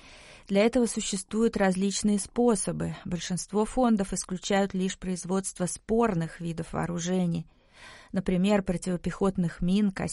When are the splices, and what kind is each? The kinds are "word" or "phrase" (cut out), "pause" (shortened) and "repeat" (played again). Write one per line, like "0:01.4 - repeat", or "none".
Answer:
none